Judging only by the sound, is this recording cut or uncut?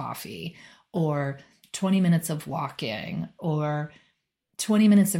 uncut